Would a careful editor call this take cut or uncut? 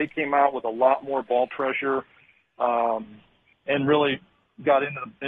cut